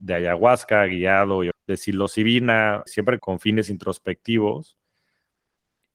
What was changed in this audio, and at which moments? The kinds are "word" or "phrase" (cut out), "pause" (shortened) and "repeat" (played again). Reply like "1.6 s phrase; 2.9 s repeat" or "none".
1.5 s word; 2.9 s word; 3.2 s word